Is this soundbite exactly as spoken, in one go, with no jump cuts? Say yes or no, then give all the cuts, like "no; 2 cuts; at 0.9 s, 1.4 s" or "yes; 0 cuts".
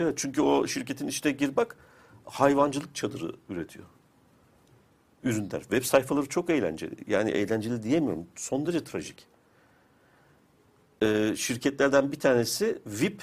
yes; 0 cuts